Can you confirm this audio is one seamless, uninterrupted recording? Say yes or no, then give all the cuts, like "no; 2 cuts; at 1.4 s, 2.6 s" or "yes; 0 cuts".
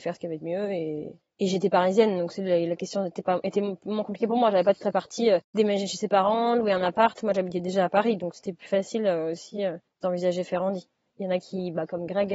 yes; 0 cuts